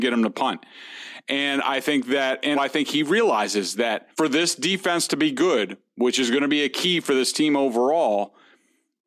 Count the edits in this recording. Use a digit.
2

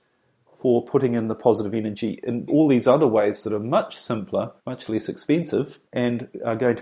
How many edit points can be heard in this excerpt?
3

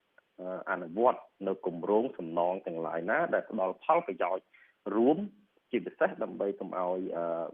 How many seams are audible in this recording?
0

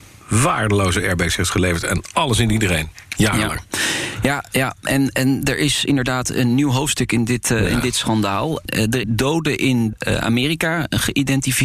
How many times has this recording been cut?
1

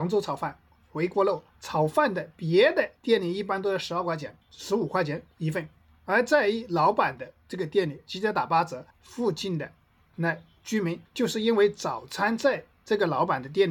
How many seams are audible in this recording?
4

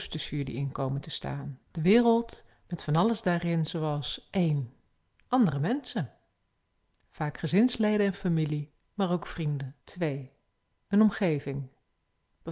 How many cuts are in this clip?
2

